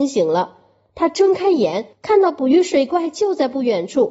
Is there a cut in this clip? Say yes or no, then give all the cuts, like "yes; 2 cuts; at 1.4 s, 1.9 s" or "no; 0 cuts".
yes; 1 cut; at 1.9 s